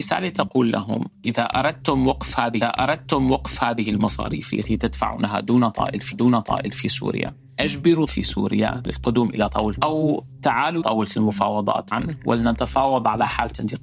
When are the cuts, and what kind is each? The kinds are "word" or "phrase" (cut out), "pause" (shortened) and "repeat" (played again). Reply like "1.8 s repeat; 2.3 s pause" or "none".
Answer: 2.6 s repeat; 6.1 s repeat; 8.1 s phrase; 9.8 s word; 10.8 s word; 11.9 s word